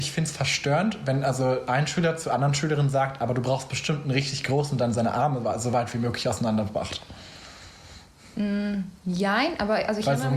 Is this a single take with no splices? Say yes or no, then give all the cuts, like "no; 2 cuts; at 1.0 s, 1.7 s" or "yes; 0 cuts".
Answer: yes; 0 cuts